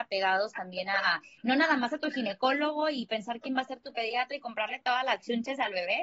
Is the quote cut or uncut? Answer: uncut